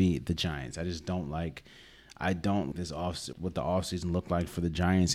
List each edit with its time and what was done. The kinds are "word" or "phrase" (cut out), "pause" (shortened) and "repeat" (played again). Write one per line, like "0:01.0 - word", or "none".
0:02.7 - word
0:03.3 - word